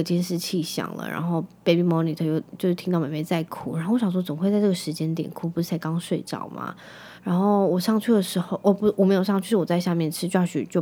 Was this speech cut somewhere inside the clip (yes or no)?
yes